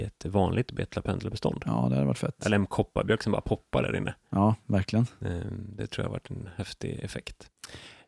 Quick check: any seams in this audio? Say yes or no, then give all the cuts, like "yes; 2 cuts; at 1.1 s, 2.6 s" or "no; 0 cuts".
no; 0 cuts